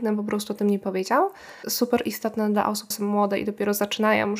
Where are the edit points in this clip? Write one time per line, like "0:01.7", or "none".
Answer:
0:01.6
0:02.9